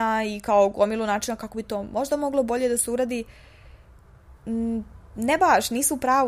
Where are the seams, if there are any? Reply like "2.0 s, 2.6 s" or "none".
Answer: none